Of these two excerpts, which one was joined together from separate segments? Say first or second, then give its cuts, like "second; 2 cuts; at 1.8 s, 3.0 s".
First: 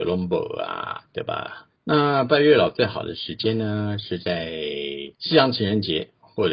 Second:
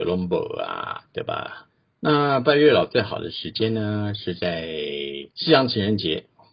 first; 1 cut; at 1.8 s